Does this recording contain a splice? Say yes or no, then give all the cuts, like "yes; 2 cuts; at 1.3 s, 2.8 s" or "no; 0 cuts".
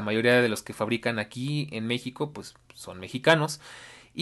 no; 0 cuts